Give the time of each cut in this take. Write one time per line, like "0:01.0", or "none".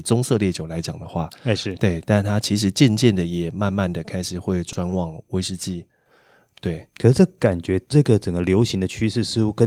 none